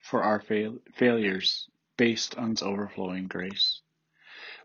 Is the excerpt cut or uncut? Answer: cut